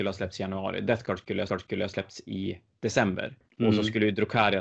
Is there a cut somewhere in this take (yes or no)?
yes